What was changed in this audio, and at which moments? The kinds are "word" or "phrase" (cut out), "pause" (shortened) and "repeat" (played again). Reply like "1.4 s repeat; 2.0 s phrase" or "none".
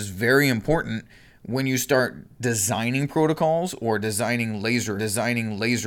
5.0 s repeat